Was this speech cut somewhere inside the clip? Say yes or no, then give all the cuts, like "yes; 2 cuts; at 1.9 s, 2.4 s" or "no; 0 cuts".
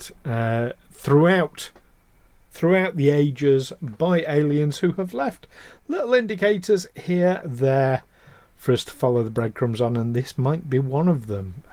yes; 1 cut; at 7.4 s